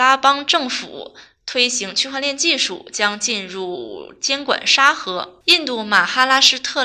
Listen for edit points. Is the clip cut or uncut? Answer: cut